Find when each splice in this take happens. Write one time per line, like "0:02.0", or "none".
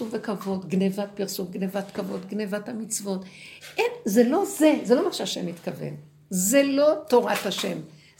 none

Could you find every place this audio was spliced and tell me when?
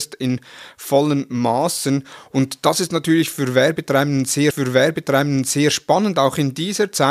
0:04.5

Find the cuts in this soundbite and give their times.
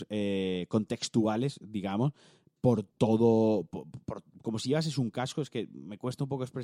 0:02.9

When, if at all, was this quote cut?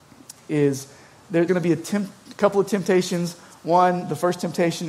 0:01.5

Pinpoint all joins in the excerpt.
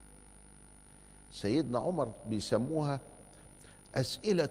none

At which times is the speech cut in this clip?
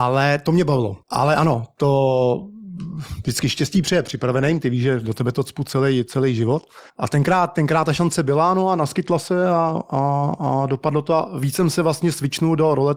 0:01.0
0:06.9

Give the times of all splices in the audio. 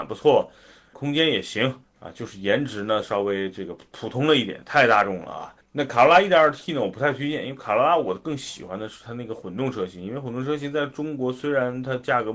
0:00.9
0:01.8
0:05.6

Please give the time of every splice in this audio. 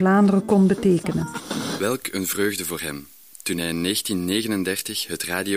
none

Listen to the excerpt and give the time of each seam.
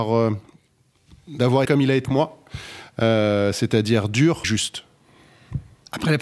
0:01.6
0:02.0
0:04.4

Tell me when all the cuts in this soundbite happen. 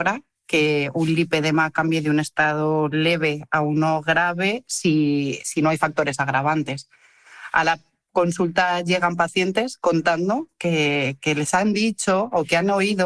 none

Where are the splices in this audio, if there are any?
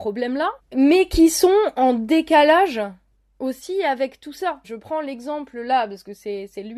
none

